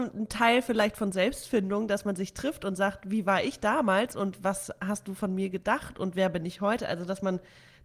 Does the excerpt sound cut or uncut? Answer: uncut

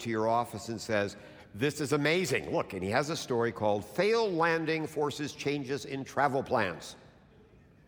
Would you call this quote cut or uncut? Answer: uncut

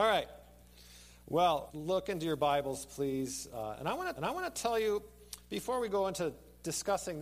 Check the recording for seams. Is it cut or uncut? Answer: cut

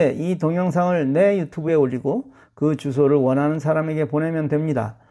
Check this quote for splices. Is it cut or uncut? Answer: uncut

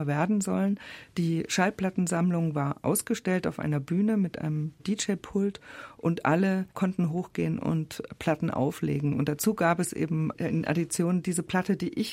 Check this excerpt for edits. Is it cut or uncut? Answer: cut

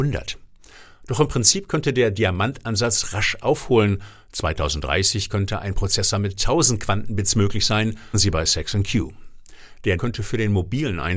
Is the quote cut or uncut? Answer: cut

